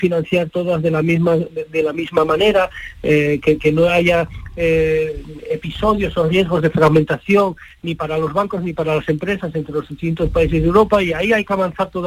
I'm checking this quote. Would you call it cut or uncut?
uncut